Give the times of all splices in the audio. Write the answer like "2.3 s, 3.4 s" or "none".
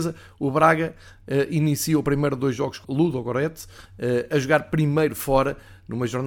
2.8 s